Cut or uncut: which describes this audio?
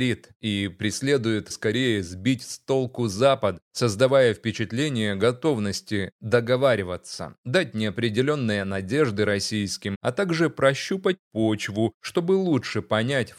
cut